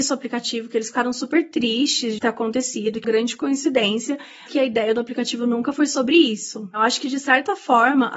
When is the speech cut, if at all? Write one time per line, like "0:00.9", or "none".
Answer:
0:02.2
0:03.0
0:04.5